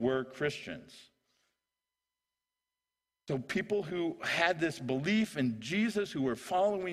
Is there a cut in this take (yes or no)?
no